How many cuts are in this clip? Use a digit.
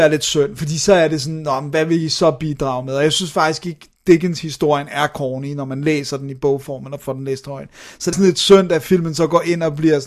1